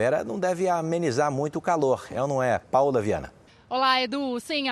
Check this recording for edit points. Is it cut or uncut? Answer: cut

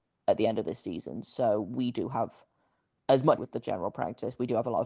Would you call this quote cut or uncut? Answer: cut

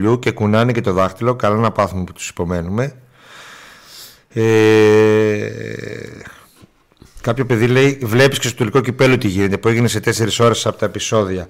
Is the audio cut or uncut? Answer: uncut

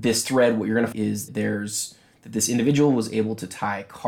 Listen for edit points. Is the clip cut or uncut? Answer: cut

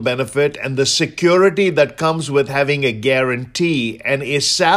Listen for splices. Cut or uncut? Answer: uncut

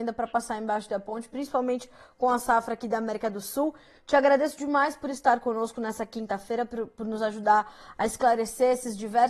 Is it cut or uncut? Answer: uncut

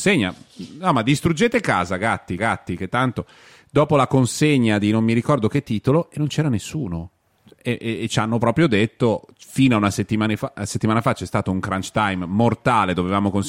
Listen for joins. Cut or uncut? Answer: cut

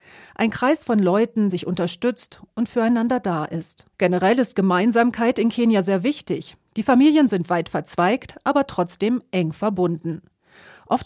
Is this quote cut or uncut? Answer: cut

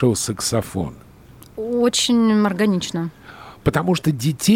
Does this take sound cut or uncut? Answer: cut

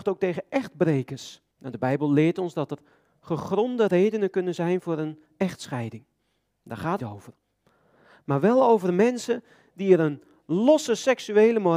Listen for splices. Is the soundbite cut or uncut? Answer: cut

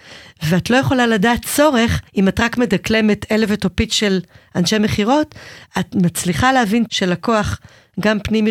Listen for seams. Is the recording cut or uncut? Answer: cut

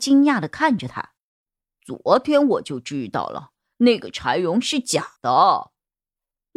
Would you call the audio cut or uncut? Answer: cut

